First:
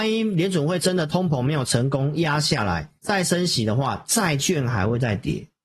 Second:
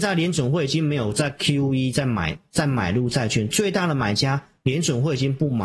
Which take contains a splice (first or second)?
first